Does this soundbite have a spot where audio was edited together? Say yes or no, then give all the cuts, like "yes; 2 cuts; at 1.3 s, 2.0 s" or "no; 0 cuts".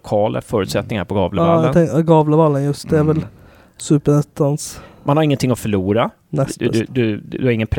no; 0 cuts